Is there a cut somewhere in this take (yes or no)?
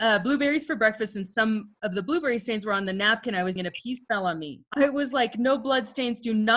yes